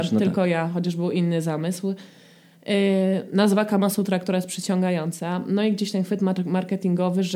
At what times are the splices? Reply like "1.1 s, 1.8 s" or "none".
none